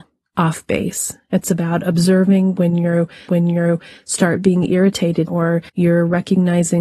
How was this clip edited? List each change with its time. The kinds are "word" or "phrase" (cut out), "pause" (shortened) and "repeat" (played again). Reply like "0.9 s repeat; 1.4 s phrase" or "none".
3.3 s repeat; 5.3 s word; 5.7 s pause